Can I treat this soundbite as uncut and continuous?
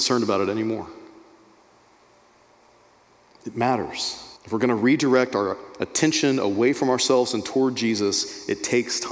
no; 1 cut; at 4.4 s

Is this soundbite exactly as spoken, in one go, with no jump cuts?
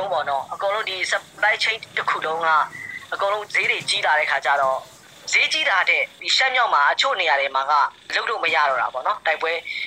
yes; 0 cuts

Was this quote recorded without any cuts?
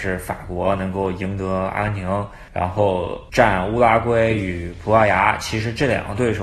no; 1 cut; at 2.5 s

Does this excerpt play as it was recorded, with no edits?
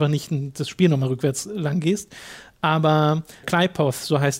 no; 1 cut; at 3.4 s

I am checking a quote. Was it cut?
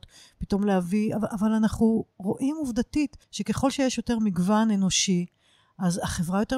yes; 1 cut; at 3.2 s

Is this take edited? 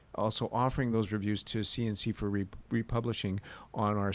no; 0 cuts

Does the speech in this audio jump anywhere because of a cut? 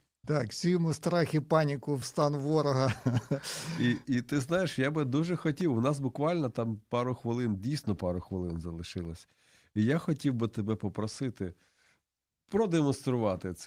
no; 0 cuts

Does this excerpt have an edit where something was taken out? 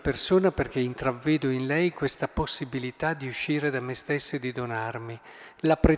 no; 0 cuts

